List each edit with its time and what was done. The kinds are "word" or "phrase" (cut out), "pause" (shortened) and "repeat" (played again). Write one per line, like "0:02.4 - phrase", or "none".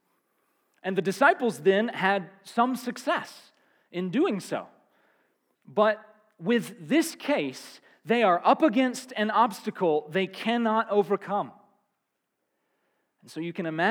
none

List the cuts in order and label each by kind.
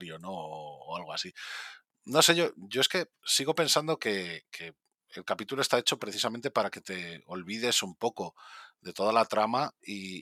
none

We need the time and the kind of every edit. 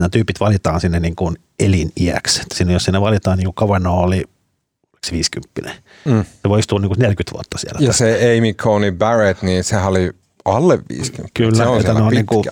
none

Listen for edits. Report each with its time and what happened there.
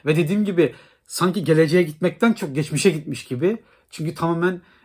none

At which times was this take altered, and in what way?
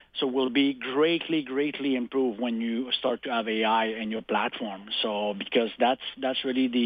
none

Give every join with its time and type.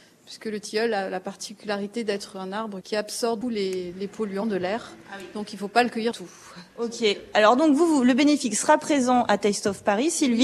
0:02.8 - word
0:03.4 - word
0:03.9 - word
0:06.1 - word

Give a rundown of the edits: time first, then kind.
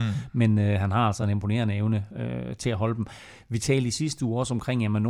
none

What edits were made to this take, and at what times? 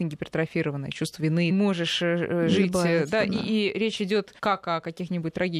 0:01.5 - phrase
0:04.4 - pause

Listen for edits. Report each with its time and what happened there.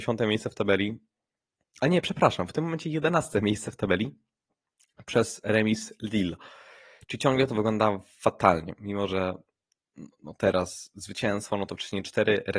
none

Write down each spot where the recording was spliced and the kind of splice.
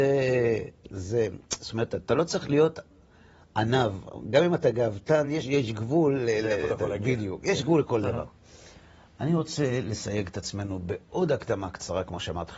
none

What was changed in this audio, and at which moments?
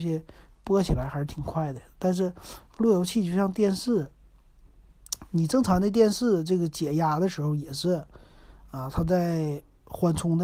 none

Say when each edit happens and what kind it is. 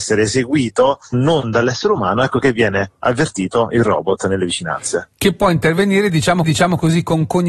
0:01.1 - word
0:06.4 - repeat

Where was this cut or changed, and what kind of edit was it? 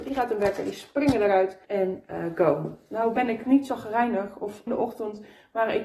0:01.6 - pause
0:03.4 - word
0:04.7 - phrase

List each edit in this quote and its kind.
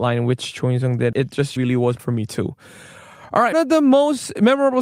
0:01.1 - word
0:01.6 - word
0:02.0 - word
0:03.5 - word

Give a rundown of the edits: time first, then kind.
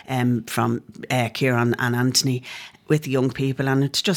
none

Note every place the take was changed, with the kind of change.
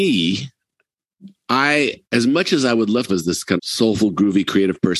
0:02.0 - pause
0:03.1 - phrase
0:03.6 - word

